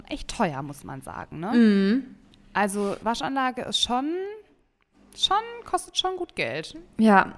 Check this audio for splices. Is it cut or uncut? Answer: uncut